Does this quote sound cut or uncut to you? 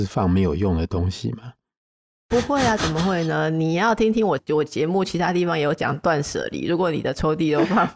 uncut